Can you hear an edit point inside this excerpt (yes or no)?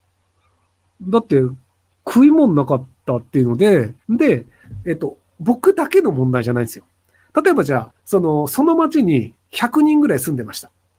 yes